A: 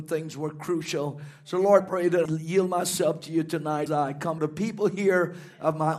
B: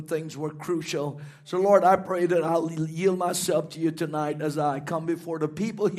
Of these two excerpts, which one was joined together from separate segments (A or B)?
A